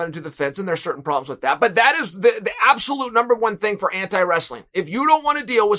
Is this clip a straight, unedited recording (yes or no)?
yes